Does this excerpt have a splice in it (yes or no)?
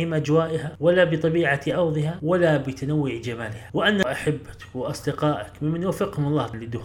no